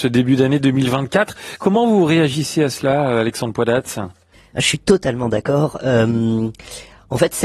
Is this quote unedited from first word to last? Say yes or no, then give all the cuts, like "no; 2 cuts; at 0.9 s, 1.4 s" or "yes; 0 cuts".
no; 1 cut; at 4.3 s